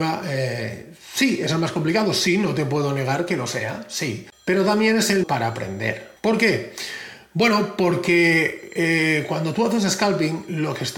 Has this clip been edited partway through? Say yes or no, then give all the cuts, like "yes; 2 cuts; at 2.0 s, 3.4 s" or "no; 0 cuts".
yes; 2 cuts; at 5.2 s, 6.2 s